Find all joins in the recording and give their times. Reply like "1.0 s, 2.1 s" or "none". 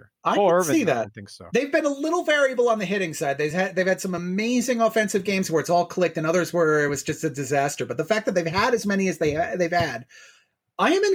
none